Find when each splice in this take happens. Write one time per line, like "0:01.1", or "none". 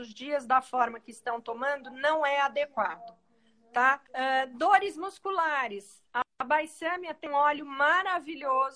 0:04.1